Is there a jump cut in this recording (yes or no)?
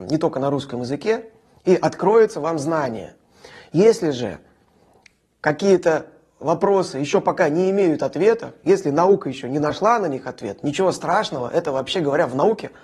no